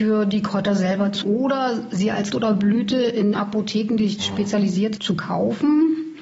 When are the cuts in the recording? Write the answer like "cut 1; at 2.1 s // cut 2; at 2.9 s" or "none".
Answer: cut 1; at 1.2 s // cut 2; at 2.3 s // cut 3; at 3.3 s // cut 4; at 4.2 s // cut 5; at 5.0 s